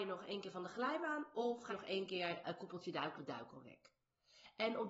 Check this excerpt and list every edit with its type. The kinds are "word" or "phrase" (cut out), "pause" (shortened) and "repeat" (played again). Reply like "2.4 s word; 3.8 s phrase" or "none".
1.7 s word; 2.4 s word; 3.2 s word